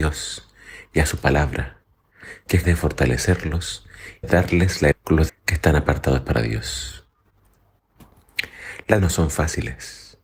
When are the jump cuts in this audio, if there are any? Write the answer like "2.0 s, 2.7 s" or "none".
2.6 s, 4.2 s, 4.9 s, 5.3 s, 9.0 s